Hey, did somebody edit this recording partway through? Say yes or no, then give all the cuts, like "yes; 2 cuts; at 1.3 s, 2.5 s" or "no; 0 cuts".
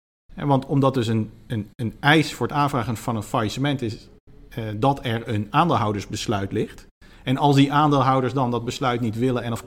no; 0 cuts